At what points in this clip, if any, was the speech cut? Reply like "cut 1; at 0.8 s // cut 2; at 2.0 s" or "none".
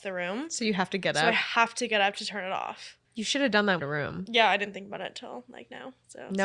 cut 1; at 3.0 s // cut 2; at 3.8 s